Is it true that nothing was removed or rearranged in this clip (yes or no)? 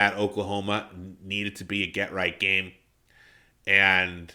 yes